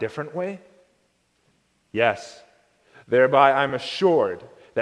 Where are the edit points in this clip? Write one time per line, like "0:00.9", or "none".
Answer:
none